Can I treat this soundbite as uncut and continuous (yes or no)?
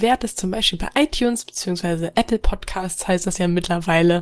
yes